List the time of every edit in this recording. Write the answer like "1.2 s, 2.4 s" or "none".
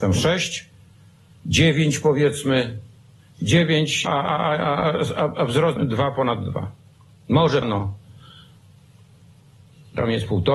4.1 s, 5.8 s, 7.6 s